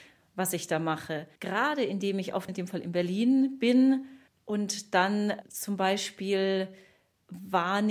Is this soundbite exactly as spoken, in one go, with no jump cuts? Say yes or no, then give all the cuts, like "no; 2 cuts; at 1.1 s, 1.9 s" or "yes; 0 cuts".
no; 3 cuts; at 1.4 s, 2.5 s, 4.3 s